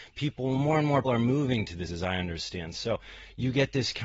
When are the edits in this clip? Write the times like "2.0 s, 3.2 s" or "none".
1.0 s, 1.9 s